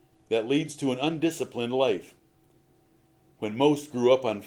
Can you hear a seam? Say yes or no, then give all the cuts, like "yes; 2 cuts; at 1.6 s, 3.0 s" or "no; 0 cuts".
no; 0 cuts